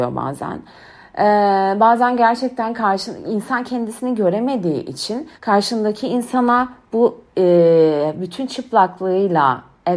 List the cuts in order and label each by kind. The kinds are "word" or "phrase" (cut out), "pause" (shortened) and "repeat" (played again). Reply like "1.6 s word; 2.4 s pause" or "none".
5.3 s pause

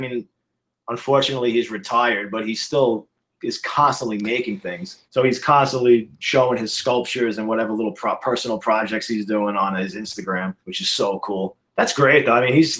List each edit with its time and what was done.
5.0 s pause; 10.6 s pause

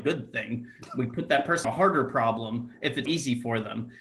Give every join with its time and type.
1.6 s word; 3.1 s word

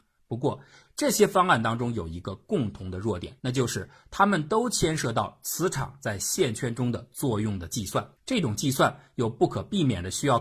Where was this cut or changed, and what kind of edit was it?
3.4 s pause; 8.2 s pause

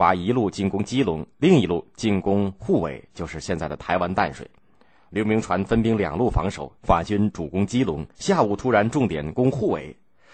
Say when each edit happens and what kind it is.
1.3 s pause; 6.8 s pause

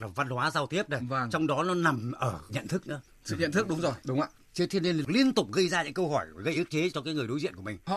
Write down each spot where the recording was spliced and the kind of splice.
2.5 s word

